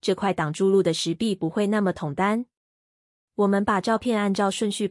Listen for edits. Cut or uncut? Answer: uncut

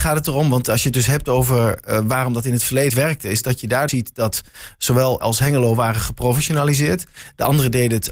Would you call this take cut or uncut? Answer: cut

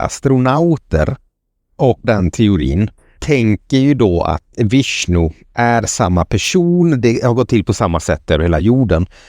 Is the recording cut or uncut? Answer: cut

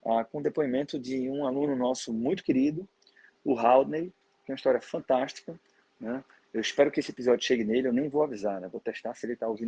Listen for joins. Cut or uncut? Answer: uncut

